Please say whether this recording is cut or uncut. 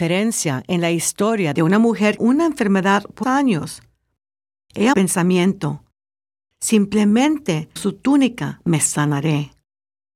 cut